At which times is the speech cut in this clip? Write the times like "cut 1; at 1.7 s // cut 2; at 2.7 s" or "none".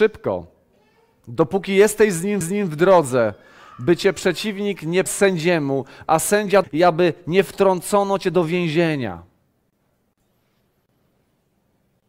cut 1; at 2.4 s // cut 2; at 5.1 s // cut 3; at 6.6 s